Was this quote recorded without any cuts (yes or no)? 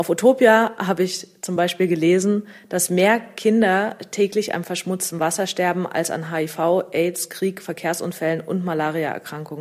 yes